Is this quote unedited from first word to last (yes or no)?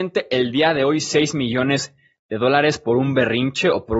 yes